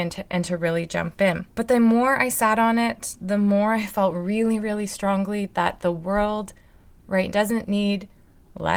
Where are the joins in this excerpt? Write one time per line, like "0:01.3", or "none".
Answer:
0:07.3

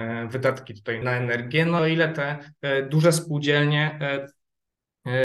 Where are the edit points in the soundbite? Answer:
0:01.0
0:01.8

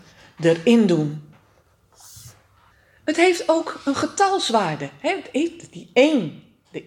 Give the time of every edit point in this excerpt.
0:02.7

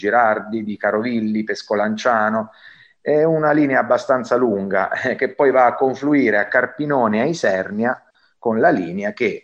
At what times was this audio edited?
none

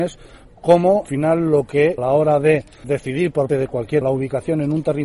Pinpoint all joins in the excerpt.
0:01.0
0:02.0
0:02.8
0:03.5
0:04.0

